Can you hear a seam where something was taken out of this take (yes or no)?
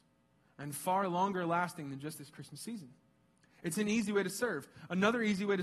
no